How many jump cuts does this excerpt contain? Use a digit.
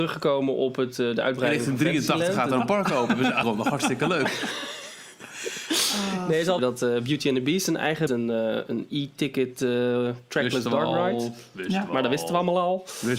3